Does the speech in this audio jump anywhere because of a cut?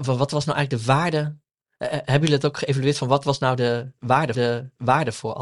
yes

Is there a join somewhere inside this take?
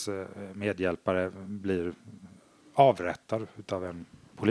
no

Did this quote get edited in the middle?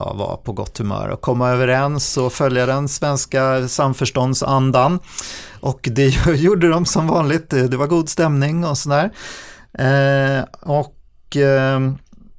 no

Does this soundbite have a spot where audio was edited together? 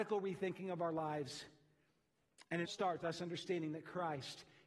yes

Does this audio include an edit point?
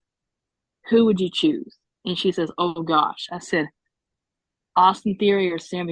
no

